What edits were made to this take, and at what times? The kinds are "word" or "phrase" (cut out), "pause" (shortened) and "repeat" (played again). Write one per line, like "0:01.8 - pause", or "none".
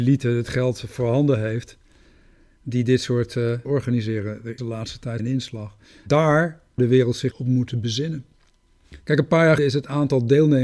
0:03.6 - word
0:04.6 - word
0:05.2 - word
0:06.8 - word
0:07.3 - word
0:09.6 - word